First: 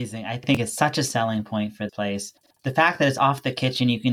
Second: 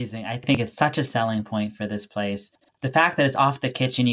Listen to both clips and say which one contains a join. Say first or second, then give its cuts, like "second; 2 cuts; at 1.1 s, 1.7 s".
first; 1 cut; at 1.9 s